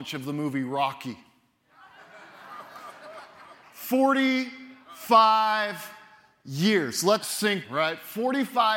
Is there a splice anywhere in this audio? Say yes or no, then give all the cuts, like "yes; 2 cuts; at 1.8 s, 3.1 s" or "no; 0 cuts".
yes; 2 cuts; at 7.2 s, 7.6 s